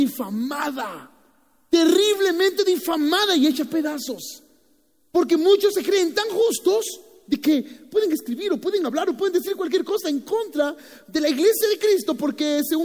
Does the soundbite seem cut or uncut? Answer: uncut